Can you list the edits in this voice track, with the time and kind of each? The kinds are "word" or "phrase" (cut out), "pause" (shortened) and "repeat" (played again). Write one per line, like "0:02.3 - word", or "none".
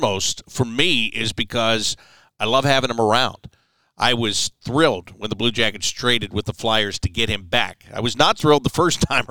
0:08.4 - word